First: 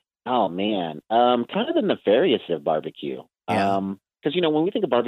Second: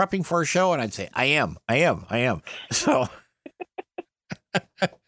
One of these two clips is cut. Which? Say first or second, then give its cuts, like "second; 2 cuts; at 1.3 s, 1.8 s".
first; 1 cut; at 2.5 s